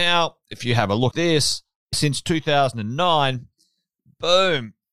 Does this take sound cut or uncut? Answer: cut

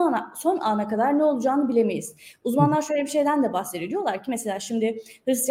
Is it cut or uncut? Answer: uncut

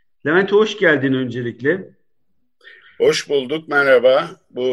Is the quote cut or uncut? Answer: uncut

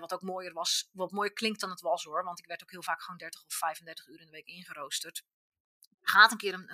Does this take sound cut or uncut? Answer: uncut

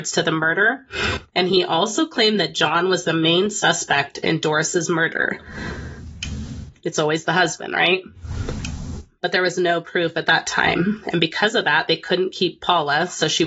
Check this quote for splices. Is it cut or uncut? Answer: uncut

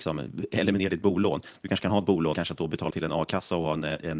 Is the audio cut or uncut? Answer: cut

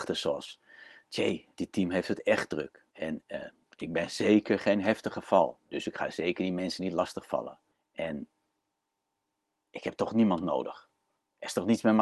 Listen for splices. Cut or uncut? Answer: cut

